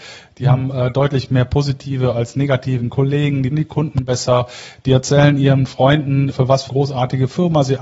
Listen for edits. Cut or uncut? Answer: cut